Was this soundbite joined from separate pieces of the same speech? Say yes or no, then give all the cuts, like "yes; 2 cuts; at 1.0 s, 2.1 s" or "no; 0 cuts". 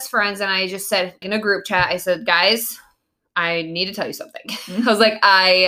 yes; 1 cut; at 1.2 s